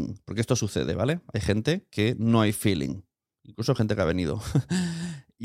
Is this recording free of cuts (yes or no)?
yes